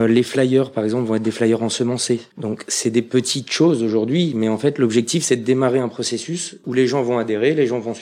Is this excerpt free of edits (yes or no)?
no